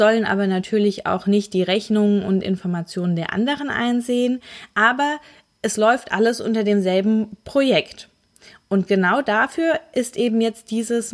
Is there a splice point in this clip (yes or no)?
no